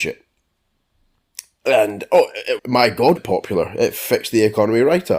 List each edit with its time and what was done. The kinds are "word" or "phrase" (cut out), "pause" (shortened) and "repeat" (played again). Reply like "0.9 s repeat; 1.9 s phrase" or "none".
2.6 s word; 3.2 s word